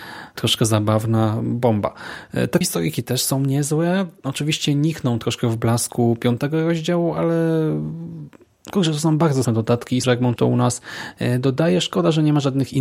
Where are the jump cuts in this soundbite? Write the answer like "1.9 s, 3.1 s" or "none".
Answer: 2.6 s, 9.4 s, 10.0 s, 10.4 s

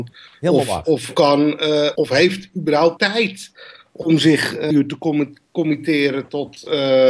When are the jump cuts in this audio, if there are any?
1.1 s, 2.0 s, 3.0 s, 4.7 s

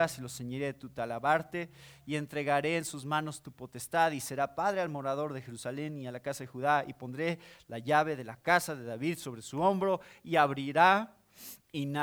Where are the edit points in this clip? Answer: none

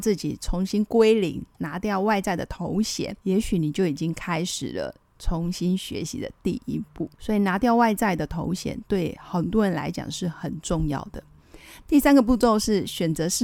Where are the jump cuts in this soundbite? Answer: 3.2 s, 7.1 s

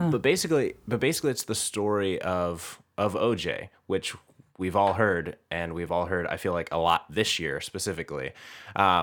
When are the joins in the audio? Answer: none

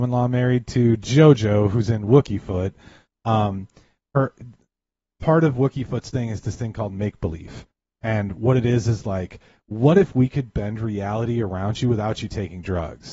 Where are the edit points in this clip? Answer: none

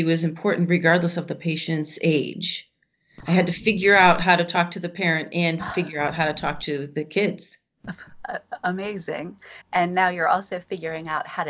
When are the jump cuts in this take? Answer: 9.6 s

